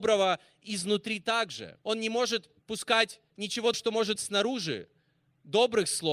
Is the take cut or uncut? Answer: cut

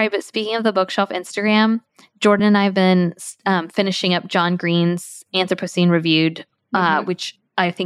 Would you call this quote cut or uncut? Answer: uncut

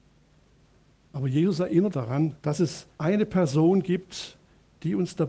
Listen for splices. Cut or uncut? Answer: cut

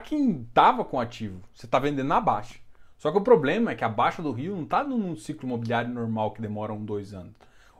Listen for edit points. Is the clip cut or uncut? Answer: uncut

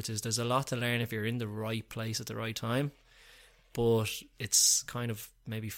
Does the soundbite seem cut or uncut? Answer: uncut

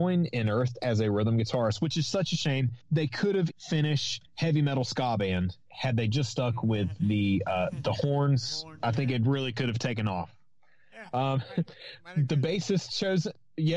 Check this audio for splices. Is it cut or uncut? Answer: cut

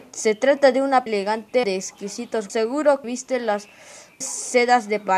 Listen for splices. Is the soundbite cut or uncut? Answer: cut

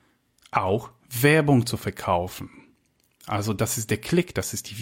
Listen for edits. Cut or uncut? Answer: uncut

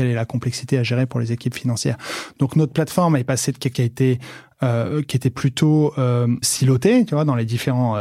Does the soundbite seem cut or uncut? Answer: cut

